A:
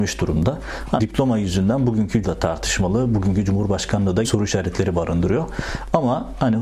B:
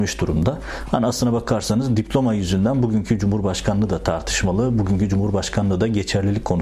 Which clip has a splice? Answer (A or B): A